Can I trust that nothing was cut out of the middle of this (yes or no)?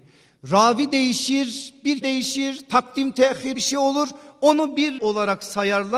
no